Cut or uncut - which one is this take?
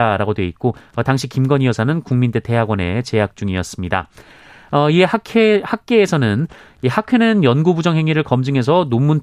uncut